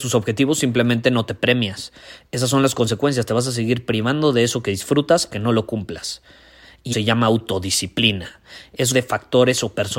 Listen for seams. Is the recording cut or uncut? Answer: cut